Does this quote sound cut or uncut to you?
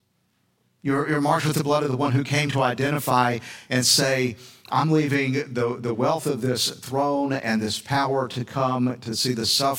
uncut